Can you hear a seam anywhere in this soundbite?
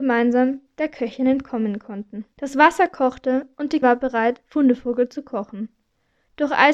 yes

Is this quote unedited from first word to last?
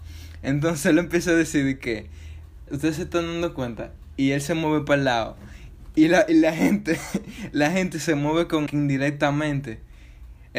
no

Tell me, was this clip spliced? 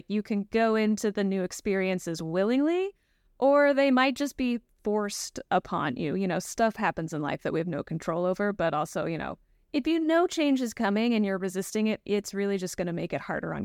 no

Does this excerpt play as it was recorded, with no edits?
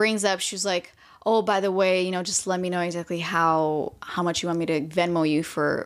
yes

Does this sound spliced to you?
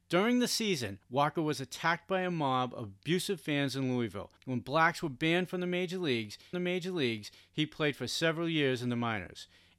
yes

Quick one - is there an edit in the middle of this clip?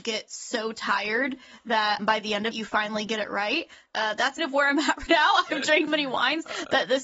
yes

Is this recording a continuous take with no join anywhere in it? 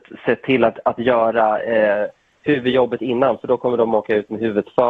yes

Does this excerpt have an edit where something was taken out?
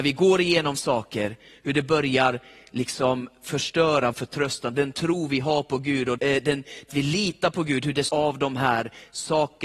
yes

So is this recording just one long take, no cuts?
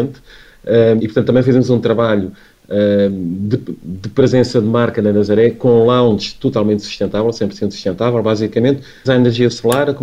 no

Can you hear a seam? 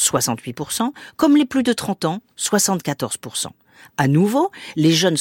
no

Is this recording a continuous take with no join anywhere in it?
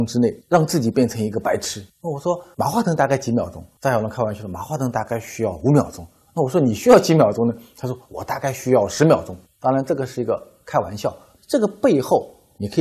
yes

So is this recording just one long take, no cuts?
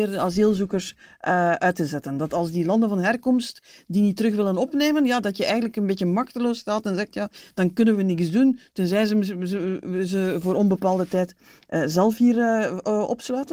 yes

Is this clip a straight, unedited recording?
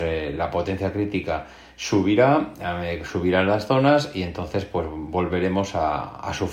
yes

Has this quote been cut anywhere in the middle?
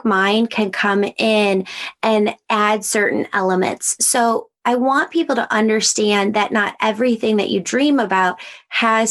no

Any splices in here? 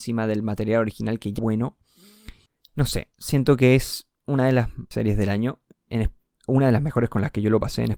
yes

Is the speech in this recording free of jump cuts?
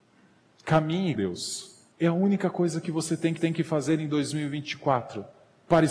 no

